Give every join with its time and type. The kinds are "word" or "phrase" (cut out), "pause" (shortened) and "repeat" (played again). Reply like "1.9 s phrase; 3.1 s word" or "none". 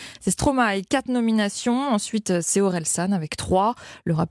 none